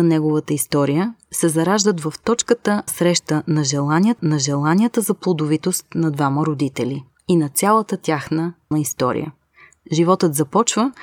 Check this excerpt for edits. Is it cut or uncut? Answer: cut